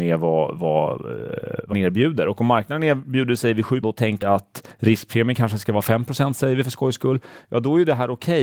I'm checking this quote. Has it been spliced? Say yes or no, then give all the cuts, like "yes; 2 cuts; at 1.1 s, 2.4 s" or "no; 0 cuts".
yes; 3 cuts; at 1.7 s, 3.8 s, 4.2 s